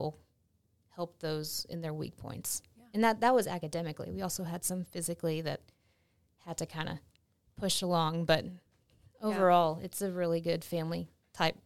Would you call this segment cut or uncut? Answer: uncut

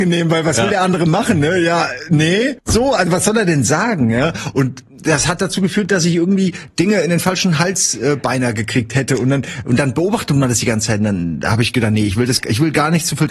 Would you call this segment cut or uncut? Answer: cut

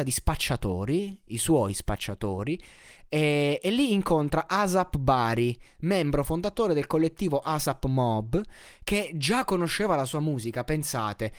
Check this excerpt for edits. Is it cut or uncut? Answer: uncut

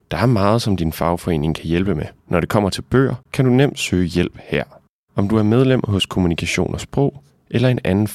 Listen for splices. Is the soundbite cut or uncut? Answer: cut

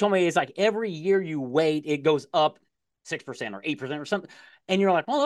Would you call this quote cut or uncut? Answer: uncut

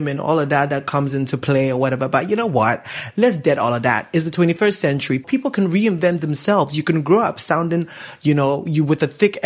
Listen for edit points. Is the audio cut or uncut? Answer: uncut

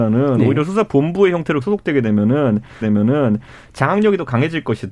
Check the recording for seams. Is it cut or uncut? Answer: cut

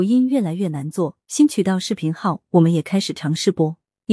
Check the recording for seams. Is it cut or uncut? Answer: cut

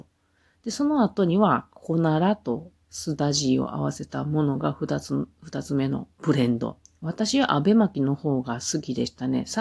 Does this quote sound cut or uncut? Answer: cut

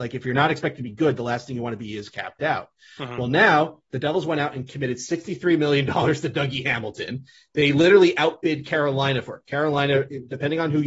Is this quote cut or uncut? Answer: uncut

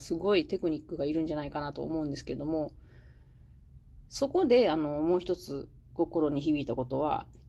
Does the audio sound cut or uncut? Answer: cut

